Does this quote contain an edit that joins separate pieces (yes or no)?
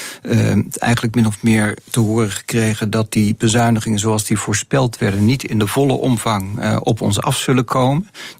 no